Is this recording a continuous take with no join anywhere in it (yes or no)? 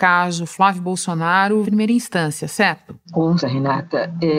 no